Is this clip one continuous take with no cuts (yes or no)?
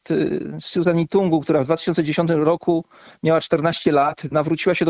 yes